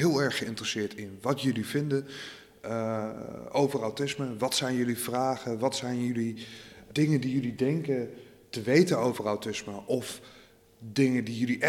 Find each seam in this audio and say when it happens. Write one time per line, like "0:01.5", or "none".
none